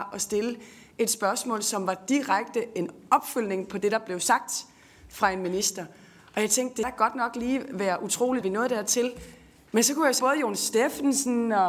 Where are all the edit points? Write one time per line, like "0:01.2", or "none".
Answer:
0:06.8
0:08.4
0:10.2

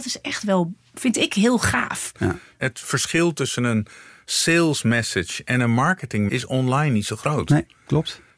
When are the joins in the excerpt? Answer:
0:06.3

